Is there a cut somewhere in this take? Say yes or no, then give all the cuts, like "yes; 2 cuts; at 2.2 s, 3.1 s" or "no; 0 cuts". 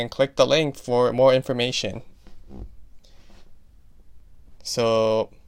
no; 0 cuts